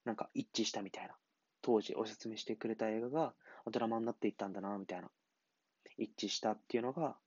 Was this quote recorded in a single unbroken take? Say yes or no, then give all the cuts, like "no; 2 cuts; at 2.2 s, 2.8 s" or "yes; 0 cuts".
yes; 0 cuts